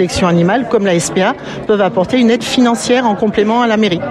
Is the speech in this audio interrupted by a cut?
no; 0 cuts

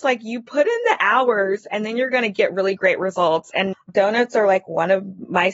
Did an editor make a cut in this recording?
yes; 1 cut; at 3.7 s

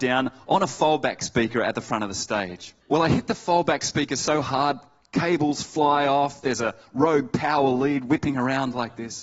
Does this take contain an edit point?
yes; 1 cut; at 2.8 s

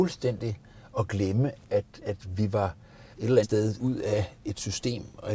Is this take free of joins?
no; 4 cuts; at 2.0 s, 3.1 s, 3.4 s, 3.8 s

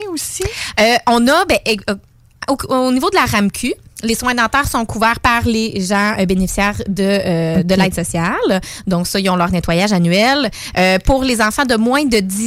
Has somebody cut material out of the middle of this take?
no; 0 cuts

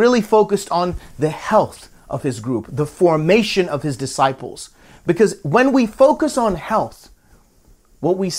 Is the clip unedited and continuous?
yes; 0 cuts

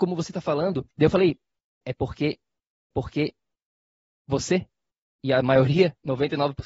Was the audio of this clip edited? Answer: yes; 3 cuts; at 0.9 s, 1.8 s, 2.9 s

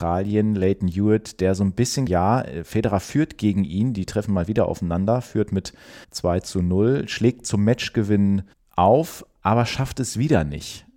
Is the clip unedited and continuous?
no; 3 cuts; at 2.1 s, 6.0 s, 8.5 s

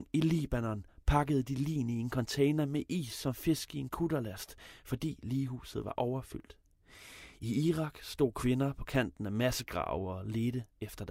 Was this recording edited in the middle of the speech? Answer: no; 0 cuts

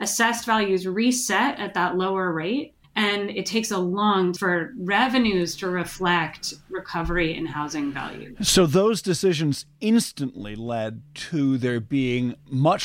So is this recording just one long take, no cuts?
no; 2 cuts; at 2.8 s, 4.4 s

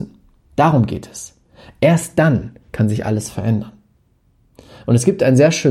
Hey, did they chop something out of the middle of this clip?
no; 0 cuts

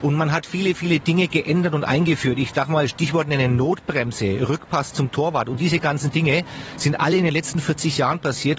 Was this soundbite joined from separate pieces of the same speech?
no; 0 cuts

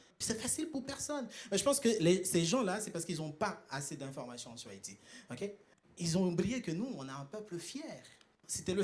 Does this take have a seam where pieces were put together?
no; 0 cuts

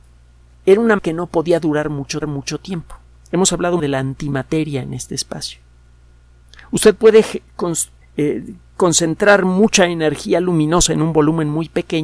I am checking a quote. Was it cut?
yes; 4 cuts; at 1.0 s, 2.2 s, 3.8 s, 8.0 s

